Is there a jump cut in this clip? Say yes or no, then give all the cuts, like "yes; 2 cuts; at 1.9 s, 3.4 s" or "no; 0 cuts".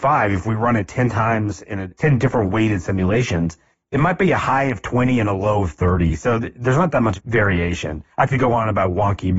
no; 0 cuts